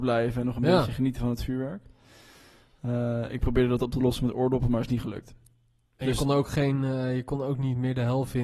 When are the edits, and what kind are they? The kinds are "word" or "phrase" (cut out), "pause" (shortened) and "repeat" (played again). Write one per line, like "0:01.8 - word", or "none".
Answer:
none